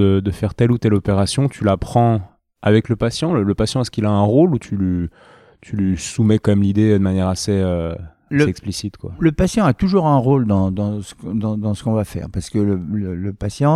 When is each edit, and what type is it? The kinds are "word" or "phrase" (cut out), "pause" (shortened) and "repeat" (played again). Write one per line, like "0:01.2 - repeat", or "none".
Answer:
none